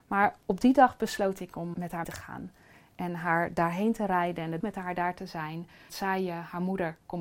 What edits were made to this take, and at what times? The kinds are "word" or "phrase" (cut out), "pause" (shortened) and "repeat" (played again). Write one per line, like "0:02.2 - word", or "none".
0:01.7 - word
0:02.0 - word
0:04.6 - word
0:05.9 - word